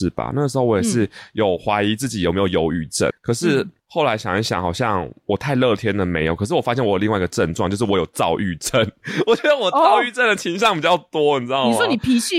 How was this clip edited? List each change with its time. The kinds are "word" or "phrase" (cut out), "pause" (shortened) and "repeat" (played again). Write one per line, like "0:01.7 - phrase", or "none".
0:03.1 - word